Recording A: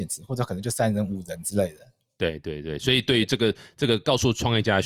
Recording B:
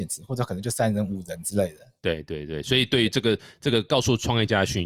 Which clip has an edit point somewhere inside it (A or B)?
B